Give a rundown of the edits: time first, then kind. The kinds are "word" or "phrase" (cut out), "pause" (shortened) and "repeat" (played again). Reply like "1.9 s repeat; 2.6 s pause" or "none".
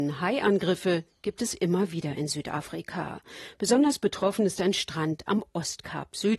none